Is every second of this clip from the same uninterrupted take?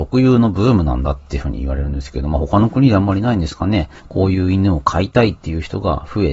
no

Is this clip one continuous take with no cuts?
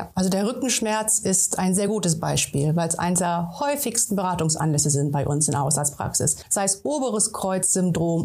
yes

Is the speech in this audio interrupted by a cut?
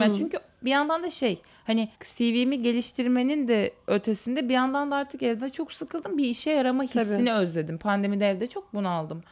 yes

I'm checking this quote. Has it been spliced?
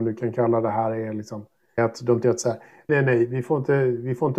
yes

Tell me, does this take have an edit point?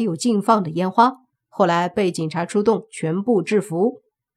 no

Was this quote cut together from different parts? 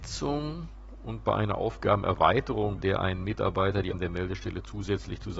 yes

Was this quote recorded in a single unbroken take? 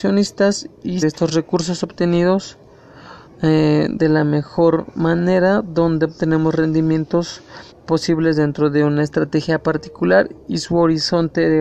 no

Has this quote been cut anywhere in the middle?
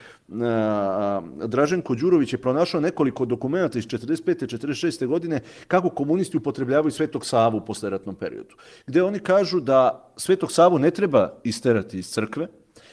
no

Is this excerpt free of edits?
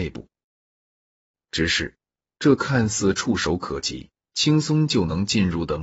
no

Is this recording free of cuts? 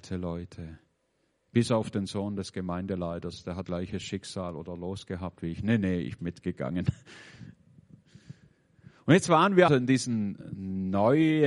no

